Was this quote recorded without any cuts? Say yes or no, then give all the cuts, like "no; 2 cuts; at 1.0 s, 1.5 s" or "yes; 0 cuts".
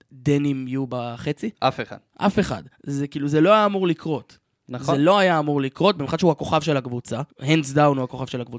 no; 2 cuts; at 1.5 s, 7.3 s